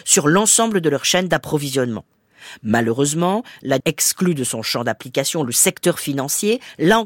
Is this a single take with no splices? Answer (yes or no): no